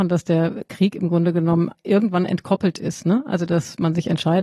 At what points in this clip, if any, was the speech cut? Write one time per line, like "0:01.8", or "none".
none